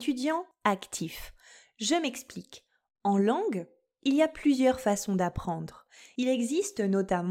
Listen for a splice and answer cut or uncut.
uncut